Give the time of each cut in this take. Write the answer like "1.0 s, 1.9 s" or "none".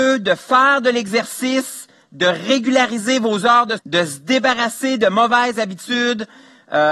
3.8 s